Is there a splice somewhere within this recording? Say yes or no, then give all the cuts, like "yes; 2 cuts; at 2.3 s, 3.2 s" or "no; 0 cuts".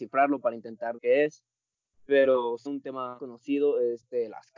yes; 3 cuts; at 1.0 s, 2.7 s, 3.2 s